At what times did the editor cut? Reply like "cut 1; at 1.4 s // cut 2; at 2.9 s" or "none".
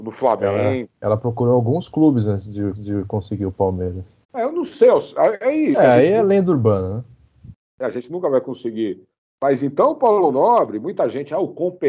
cut 1; at 2.8 s // cut 2; at 4.2 s // cut 3; at 5.7 s // cut 4; at 9.2 s